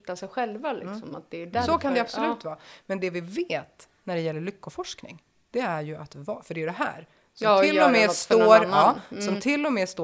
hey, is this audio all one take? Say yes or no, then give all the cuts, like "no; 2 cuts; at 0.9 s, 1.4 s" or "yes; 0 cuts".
yes; 0 cuts